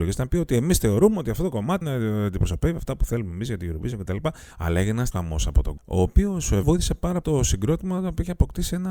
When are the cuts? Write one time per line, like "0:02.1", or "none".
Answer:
0:01.8
0:04.5
0:05.1
0:05.8
0:06.6
0:07.2